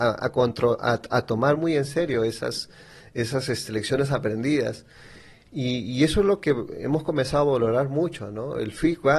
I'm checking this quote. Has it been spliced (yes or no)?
no